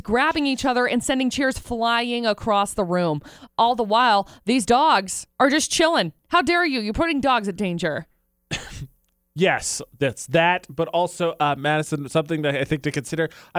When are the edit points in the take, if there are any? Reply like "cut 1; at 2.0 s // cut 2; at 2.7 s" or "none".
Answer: none